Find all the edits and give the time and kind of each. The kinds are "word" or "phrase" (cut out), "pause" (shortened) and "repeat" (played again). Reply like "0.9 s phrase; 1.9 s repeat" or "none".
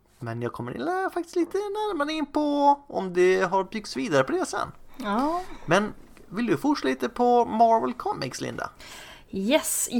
none